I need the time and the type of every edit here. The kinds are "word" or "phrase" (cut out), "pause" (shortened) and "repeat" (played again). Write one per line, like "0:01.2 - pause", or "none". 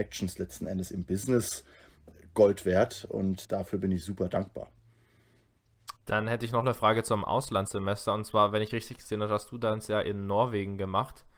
0:03.4 - word
0:06.0 - pause